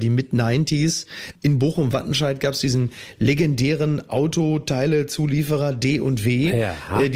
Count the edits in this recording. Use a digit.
0